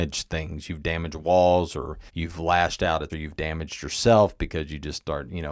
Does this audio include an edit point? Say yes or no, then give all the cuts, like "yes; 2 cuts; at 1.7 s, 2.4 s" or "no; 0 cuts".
yes; 2 cuts; at 2.1 s, 3.1 s